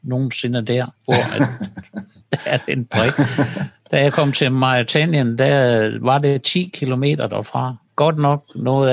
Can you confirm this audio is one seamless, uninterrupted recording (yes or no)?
no